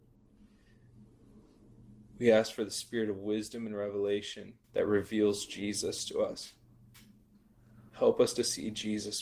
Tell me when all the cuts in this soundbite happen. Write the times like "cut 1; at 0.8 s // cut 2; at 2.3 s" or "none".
cut 1; at 4.6 s